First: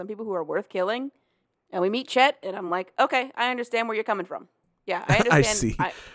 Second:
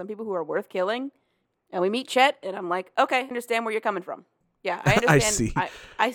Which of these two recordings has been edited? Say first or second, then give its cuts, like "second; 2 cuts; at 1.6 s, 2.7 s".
second; 1 cut; at 3.3 s